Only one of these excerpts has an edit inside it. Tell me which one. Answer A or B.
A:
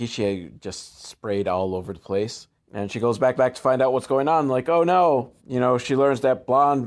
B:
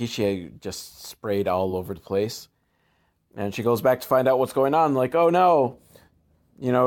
A